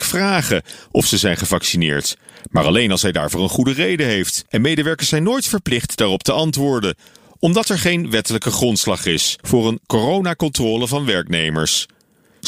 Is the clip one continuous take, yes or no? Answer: yes